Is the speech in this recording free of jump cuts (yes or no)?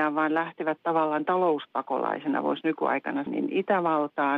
no